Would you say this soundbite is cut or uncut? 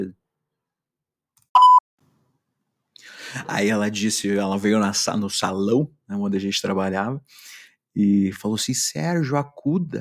uncut